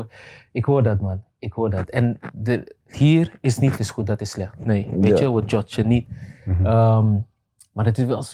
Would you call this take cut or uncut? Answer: cut